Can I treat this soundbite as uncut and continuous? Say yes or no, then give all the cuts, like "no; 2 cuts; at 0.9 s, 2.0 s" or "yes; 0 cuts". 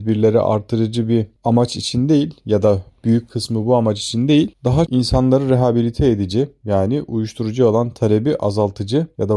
no; 1 cut; at 4.9 s